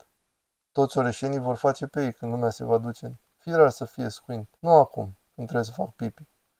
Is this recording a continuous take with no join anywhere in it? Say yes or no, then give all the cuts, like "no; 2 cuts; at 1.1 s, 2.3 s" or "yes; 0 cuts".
no; 1 cut; at 4.6 s